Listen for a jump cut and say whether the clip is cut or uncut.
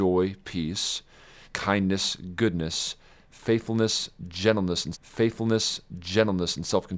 cut